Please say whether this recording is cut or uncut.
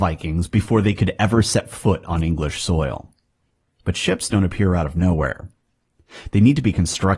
uncut